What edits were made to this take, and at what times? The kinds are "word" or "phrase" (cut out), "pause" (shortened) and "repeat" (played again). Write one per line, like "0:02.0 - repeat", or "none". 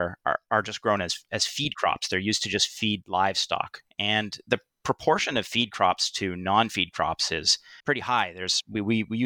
0:07.8 - pause